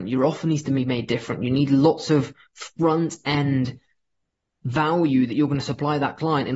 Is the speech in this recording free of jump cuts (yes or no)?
yes